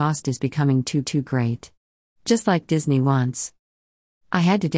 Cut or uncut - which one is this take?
cut